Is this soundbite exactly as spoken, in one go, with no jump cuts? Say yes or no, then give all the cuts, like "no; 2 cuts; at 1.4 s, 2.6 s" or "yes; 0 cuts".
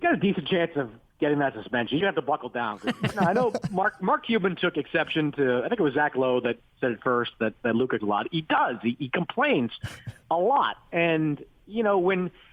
no; 2 cuts; at 2.0 s, 8.0 s